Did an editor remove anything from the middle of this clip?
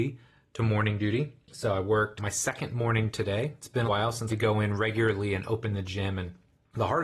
yes; 3 cuts; at 2.2 s, 3.9 s, 4.3 s

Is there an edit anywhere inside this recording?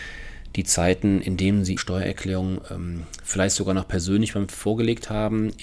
yes; 2 cuts; at 1.8 s, 4.5 s

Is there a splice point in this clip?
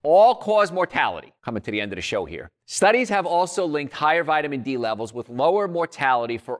yes; 2 cuts; at 1.4 s, 2.6 s

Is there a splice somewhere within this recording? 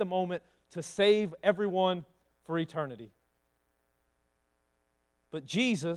no; 0 cuts

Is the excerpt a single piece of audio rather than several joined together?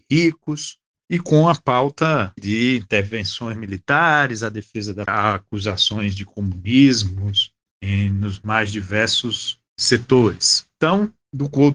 no; 2 cuts; at 2.4 s, 5.1 s

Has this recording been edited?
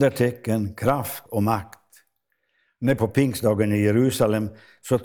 yes; 2 cuts; at 1.3 s, 3.0 s

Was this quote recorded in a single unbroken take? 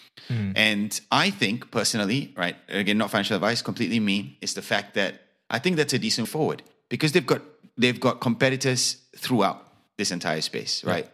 no; 1 cut; at 6.2 s

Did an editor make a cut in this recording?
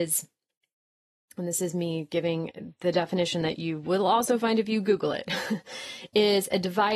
no; 0 cuts

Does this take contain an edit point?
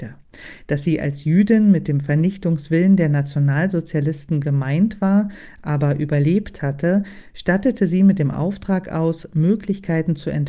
no; 0 cuts

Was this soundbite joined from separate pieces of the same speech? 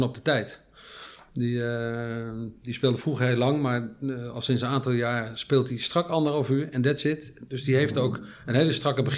no; 0 cuts

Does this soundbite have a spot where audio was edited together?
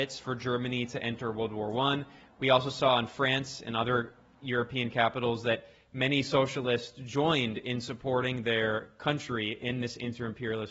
no; 0 cuts

